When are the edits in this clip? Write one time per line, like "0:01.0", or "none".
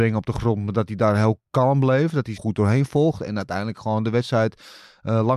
0:02.4